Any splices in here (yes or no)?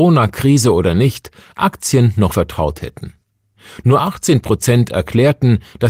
yes